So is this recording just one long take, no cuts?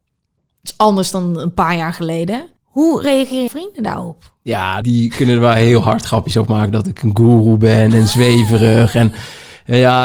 no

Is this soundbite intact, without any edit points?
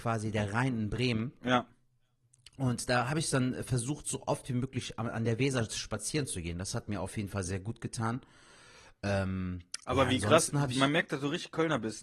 yes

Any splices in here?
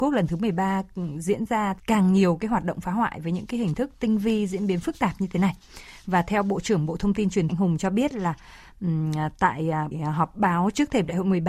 yes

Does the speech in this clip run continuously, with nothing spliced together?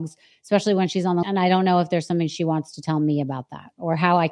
no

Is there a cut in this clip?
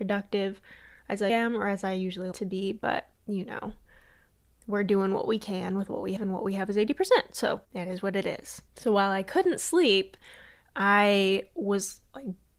yes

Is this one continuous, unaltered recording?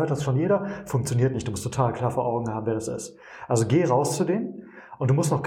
yes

